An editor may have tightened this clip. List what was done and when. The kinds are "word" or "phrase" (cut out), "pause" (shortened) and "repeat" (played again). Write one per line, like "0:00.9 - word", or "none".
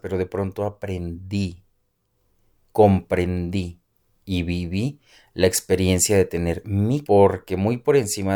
0:07.0 - word